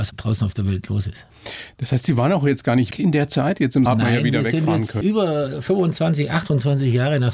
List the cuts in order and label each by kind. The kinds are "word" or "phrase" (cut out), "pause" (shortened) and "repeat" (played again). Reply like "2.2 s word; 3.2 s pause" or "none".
2.9 s word; 3.9 s word; 5.0 s word